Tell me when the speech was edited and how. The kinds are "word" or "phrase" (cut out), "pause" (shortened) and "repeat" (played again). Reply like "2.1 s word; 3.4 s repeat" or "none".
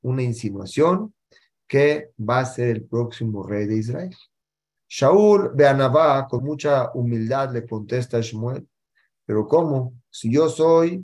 6.4 s word

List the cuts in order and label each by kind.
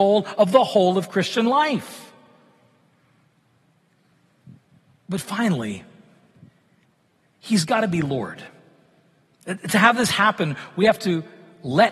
none

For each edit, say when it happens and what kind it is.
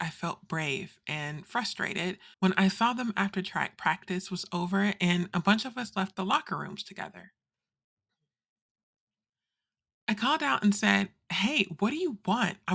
2.3 s pause

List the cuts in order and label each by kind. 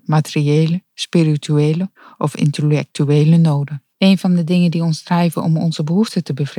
3.9 s pause

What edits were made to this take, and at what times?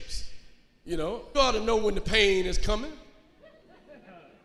1.3 s word

